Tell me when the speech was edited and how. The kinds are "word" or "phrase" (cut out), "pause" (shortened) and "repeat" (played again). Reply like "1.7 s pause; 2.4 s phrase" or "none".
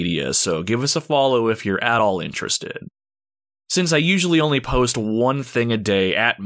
none